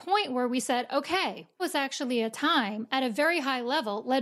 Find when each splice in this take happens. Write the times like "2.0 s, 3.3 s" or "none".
1.6 s